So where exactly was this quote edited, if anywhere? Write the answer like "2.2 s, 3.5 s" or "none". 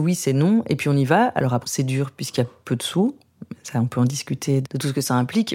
1.6 s, 4.6 s